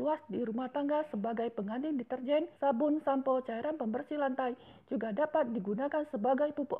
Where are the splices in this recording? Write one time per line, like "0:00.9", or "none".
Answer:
0:02.5